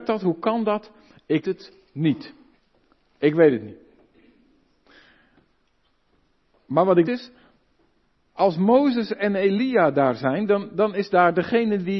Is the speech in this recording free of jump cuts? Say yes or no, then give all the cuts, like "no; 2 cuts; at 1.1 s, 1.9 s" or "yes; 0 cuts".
no; 3 cuts; at 1.4 s, 2.6 s, 7.0 s